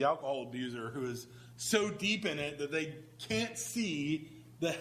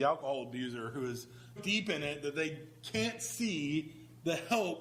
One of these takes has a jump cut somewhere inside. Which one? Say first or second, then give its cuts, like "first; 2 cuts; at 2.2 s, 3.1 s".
second; 1 cut; at 1.6 s